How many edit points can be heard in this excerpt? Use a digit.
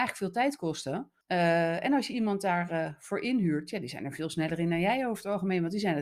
1